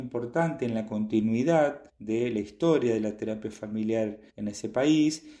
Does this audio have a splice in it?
yes; 2 cuts; at 1.9 s, 4.3 s

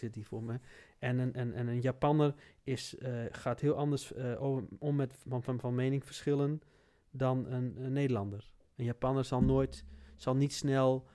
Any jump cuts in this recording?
no; 0 cuts

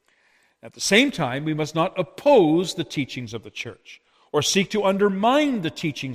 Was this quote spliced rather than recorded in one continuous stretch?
no; 0 cuts

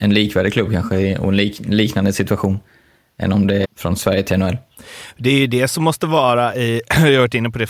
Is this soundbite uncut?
no; 1 cut; at 3.6 s

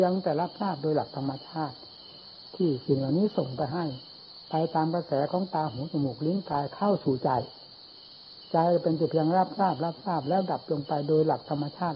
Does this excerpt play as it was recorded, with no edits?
yes; 0 cuts

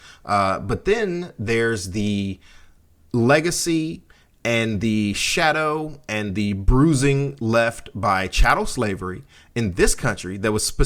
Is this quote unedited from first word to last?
yes; 0 cuts

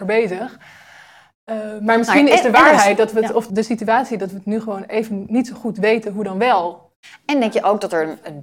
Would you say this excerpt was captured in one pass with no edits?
no; 1 cut; at 3.5 s

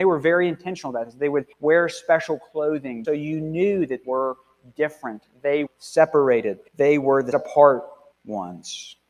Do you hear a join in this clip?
yes; 7 cuts; at 1.5 s, 3.0 s, 4.0 s, 5.7 s, 6.7 s, 7.3 s, 8.1 s

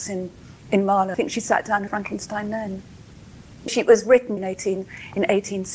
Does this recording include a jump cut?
yes; 4 cuts; at 1.1 s, 1.9 s, 3.7 s, 4.4 s

